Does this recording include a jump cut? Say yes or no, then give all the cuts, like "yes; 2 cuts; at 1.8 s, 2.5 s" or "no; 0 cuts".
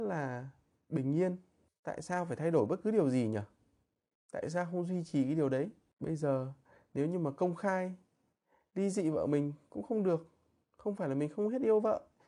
no; 0 cuts